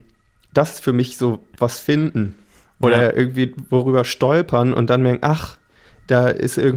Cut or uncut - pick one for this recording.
uncut